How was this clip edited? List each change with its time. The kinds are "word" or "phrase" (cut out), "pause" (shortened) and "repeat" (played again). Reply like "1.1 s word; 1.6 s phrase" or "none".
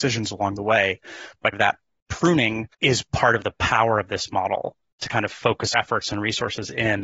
1.5 s word; 2.7 s pause; 5.7 s word